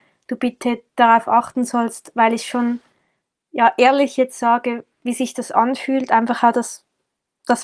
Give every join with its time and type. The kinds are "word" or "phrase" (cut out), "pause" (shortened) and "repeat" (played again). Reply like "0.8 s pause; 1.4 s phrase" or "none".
none